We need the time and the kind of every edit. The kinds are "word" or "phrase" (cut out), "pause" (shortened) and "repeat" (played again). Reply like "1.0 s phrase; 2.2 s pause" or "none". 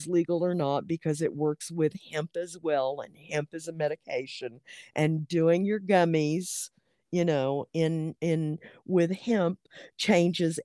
none